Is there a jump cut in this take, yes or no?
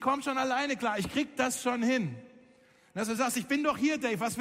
no